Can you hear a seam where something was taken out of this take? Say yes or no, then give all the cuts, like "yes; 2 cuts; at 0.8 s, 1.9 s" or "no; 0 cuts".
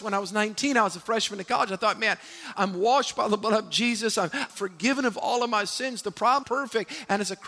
yes; 3 cuts; at 2.5 s, 4.5 s, 6.4 s